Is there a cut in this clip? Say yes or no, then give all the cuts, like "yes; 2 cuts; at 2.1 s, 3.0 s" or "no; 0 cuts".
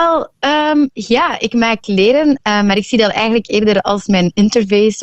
no; 0 cuts